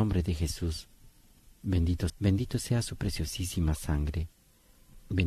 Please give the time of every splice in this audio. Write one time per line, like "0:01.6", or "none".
0:02.1